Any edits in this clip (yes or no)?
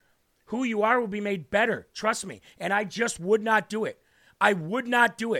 no